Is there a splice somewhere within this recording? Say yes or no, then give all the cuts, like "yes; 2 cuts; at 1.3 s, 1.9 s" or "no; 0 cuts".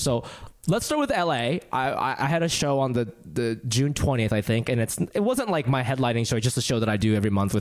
no; 0 cuts